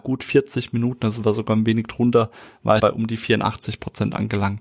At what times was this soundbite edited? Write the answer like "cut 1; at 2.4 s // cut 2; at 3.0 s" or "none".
cut 1; at 2.8 s